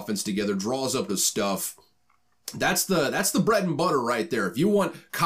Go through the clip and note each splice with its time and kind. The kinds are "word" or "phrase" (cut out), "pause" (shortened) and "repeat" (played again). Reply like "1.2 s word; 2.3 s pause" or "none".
1.1 s phrase